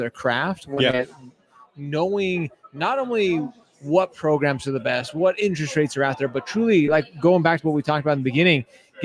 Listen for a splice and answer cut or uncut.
uncut